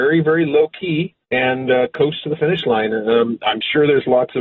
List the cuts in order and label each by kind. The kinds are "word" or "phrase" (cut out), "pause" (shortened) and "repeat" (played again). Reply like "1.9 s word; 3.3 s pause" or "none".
1.2 s pause